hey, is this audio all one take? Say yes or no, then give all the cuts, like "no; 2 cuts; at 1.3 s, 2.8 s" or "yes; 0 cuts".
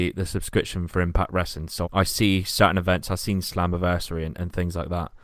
no; 1 cut; at 1.8 s